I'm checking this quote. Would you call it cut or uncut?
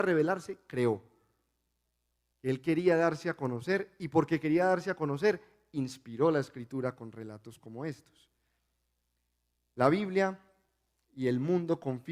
uncut